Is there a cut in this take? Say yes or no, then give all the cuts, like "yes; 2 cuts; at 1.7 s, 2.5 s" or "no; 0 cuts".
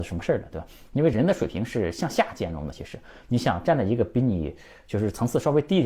no; 0 cuts